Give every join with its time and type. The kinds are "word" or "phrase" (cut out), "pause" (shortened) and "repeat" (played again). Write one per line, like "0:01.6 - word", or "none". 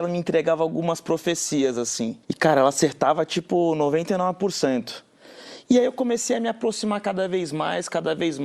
0:02.2 - pause

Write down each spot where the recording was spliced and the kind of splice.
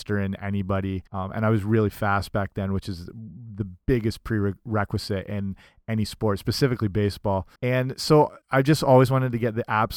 0:01.1 - pause
0:07.6 - pause
0:08.4 - pause

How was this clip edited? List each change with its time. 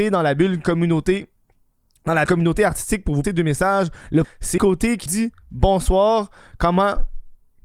0:02.3 - word
0:03.2 - word
0:04.2 - word
0:04.6 - word
0:05.1 - word

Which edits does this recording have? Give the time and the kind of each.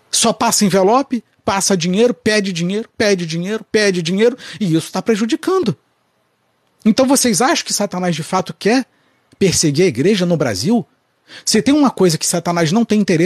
none

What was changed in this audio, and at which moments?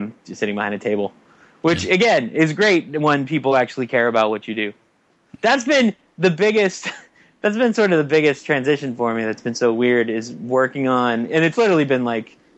none

